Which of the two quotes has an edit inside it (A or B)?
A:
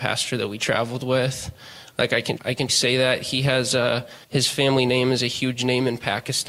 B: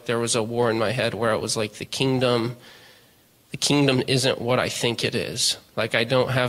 A